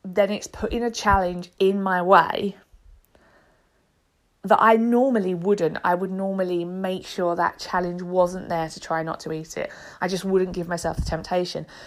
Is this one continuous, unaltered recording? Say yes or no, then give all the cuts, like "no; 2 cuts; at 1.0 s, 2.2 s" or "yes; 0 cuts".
yes; 0 cuts